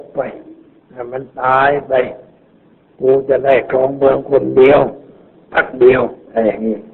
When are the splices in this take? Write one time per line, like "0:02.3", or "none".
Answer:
none